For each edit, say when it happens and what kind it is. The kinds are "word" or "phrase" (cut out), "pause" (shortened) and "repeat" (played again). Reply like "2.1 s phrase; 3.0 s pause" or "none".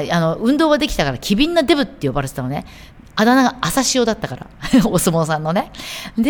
none